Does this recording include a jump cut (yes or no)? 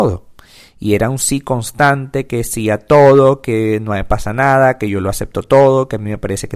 no